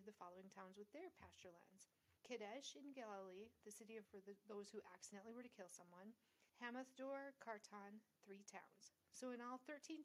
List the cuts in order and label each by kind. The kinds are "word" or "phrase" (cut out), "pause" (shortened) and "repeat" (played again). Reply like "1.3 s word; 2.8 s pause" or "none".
2.2 s pause; 4.1 s word; 6.5 s pause